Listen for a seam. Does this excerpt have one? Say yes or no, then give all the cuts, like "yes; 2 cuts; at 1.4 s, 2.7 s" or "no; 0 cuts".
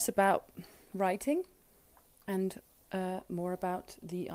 no; 0 cuts